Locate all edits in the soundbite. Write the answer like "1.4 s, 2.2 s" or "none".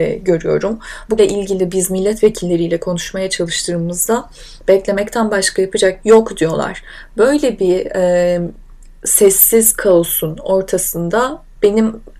1.2 s, 6.0 s